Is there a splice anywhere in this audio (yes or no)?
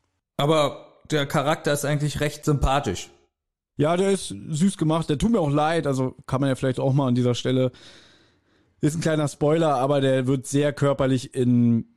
no